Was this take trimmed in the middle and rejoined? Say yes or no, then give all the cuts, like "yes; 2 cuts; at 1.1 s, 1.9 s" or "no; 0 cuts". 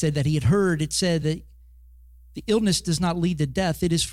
no; 0 cuts